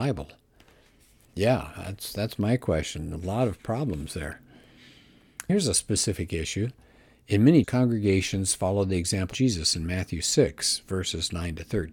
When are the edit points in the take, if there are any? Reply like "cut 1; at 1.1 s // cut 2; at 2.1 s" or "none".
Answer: cut 1; at 5.5 s // cut 2; at 7.6 s // cut 3; at 9.3 s